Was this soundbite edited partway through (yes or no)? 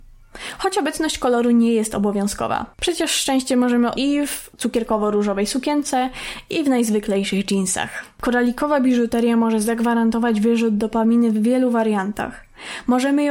yes